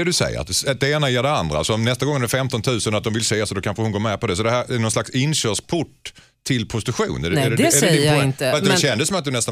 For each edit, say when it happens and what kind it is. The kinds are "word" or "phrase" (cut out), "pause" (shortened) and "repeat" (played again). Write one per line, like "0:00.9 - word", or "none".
none